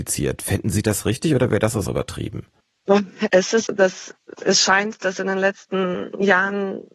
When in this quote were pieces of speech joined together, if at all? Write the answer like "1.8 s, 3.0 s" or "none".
1.8 s, 3.7 s